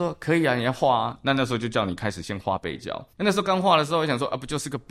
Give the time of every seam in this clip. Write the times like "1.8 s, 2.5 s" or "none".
3.1 s